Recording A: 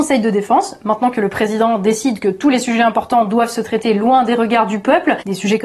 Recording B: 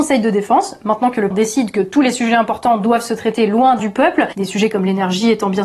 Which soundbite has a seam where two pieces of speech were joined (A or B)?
B